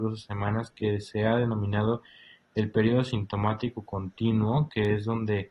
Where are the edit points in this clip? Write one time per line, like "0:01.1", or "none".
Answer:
none